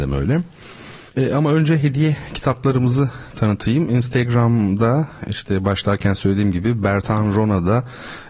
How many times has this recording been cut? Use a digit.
1